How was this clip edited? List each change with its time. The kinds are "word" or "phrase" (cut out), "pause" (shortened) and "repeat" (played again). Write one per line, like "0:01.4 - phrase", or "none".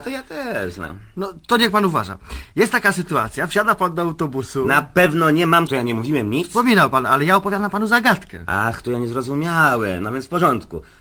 0:05.7 - word